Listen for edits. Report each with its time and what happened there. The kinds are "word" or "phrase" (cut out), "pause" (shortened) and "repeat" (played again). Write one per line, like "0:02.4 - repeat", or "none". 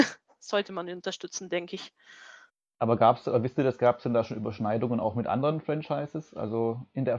none